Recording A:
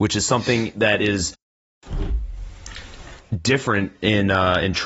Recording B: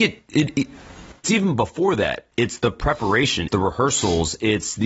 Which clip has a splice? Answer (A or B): B